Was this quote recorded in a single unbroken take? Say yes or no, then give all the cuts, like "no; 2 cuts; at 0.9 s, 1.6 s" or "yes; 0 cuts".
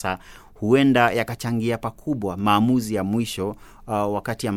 yes; 0 cuts